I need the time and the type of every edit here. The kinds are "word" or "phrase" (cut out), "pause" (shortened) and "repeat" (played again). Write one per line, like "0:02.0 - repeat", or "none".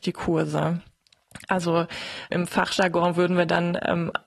0:02.3 - word